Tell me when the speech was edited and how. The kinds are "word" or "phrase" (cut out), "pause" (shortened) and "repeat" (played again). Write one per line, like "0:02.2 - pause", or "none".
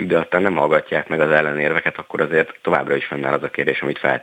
none